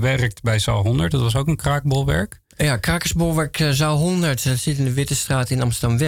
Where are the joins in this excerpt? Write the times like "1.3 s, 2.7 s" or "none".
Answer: none